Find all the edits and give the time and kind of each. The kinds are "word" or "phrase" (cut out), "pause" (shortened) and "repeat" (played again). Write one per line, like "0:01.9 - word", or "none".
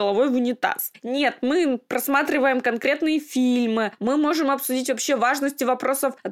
none